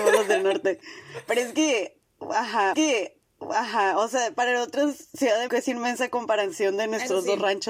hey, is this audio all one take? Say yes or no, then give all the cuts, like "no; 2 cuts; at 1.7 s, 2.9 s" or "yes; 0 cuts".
no; 2 cuts; at 2.7 s, 5.5 s